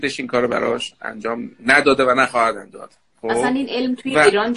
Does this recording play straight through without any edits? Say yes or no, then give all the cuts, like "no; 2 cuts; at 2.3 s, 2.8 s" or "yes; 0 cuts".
yes; 0 cuts